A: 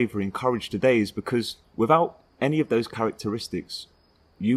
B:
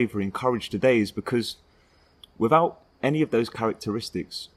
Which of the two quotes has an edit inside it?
A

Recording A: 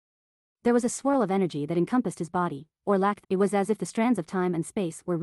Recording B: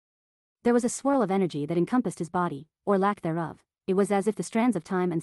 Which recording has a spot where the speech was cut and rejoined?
A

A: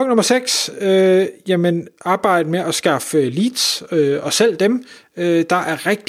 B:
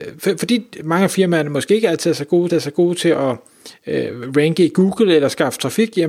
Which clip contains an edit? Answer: B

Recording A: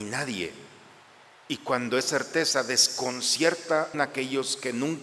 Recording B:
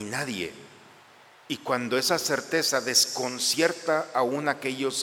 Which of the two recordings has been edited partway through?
A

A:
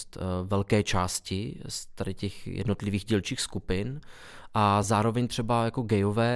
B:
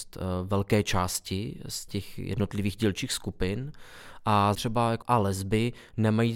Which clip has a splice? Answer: B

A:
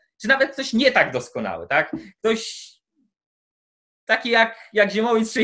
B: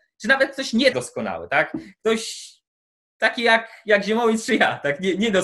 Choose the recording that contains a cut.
B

